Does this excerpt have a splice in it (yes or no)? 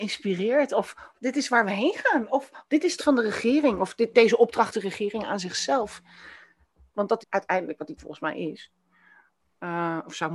yes